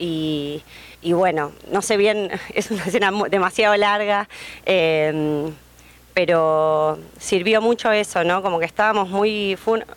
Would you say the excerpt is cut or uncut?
cut